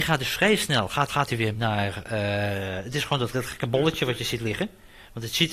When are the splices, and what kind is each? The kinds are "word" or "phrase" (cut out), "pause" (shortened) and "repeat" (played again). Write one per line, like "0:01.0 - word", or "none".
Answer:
0:01.1 - repeat
0:01.5 - word
0:03.3 - word